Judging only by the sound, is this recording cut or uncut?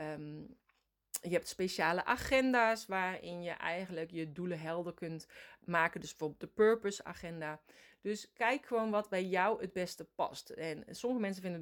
uncut